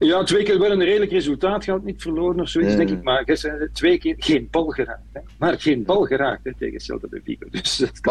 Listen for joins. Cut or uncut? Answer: uncut